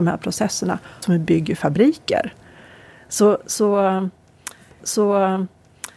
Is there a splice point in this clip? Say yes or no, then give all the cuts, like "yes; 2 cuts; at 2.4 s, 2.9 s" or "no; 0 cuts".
yes; 2 cuts; at 1.0 s, 4.8 s